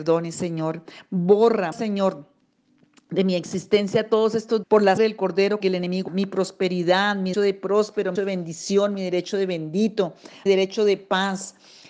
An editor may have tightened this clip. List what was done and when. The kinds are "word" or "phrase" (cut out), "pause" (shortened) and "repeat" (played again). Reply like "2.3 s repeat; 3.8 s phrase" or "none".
1.7 s word; 4.6 s word; 5.0 s word; 5.6 s word; 6.1 s word; 7.3 s word; 8.2 s word; 10.5 s word